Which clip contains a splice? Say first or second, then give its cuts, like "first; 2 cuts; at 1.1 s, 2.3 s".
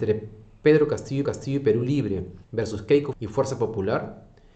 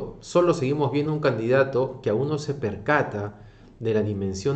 first; 3 cuts; at 1.2 s, 2.4 s, 3.1 s